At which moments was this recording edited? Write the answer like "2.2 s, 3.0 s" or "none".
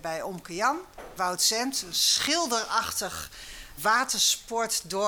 1.2 s, 3.8 s